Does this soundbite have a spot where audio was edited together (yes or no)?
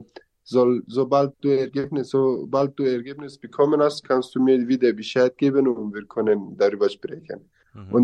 no